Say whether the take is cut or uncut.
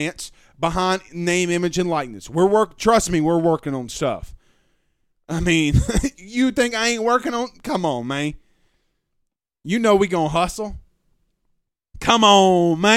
uncut